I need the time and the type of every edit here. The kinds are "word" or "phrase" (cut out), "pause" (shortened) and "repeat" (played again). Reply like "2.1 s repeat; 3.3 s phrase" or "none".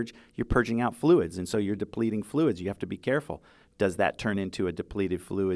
none